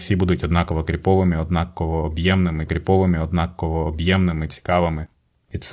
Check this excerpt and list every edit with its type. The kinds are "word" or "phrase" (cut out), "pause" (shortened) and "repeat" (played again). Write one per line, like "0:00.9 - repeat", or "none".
0:02.7 - repeat